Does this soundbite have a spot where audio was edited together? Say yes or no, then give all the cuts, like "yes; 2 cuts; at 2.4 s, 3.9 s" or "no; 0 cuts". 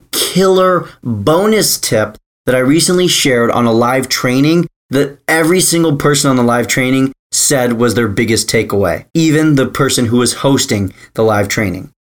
yes; 1 cut; at 9.1 s